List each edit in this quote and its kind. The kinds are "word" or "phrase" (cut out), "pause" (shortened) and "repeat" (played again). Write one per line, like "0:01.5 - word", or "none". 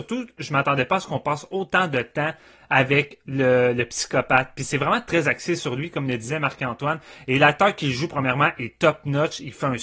none